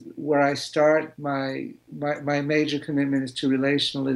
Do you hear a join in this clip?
yes; 1 cut; at 1.9 s

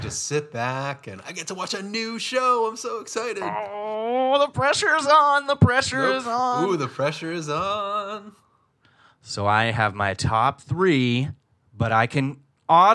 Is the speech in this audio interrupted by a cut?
no; 0 cuts

